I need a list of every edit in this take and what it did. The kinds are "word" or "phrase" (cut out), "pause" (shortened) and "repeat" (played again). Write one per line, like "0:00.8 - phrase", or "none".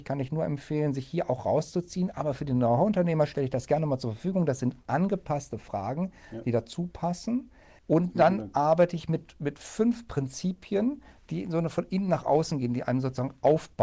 none

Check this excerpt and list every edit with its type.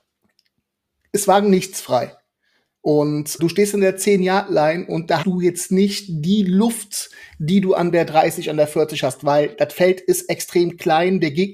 0:03.4 - word
0:05.2 - word

